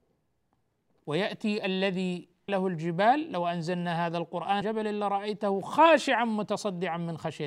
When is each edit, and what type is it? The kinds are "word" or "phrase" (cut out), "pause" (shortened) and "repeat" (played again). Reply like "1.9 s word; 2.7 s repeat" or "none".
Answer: 2.5 s word; 4.6 s word